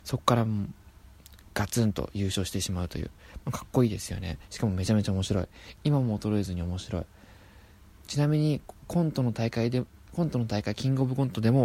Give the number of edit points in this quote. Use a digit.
0